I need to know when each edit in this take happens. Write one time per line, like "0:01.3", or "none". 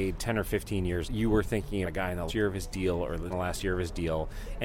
0:01.0
0:01.8
0:02.3
0:03.3